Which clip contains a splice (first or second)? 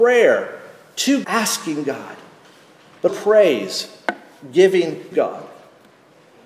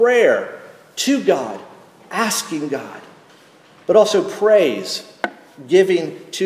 first